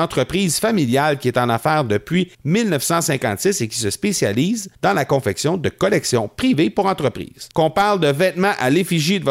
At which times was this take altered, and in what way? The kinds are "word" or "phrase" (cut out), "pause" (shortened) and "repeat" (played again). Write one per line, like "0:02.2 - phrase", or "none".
0:02.3 - pause
0:04.7 - pause
0:07.5 - pause